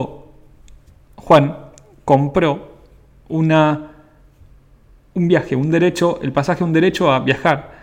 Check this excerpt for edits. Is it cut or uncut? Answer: uncut